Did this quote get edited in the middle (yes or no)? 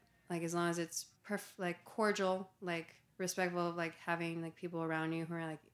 yes